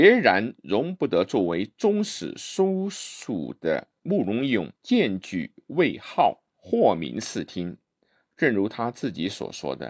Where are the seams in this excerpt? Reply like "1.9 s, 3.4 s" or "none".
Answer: 4.8 s, 6.5 s